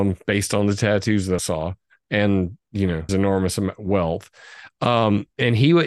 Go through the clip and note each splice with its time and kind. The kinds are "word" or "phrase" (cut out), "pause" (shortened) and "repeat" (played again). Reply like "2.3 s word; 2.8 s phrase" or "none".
1.4 s word; 3.1 s word